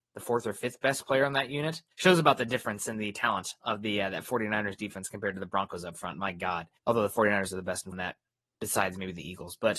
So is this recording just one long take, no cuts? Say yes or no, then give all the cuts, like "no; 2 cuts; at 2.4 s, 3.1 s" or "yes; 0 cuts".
no; 3 cuts; at 1.9 s, 6.8 s, 7.9 s